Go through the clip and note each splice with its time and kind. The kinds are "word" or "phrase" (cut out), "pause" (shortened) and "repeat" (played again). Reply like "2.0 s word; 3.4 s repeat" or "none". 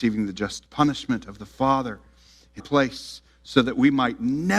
2.6 s word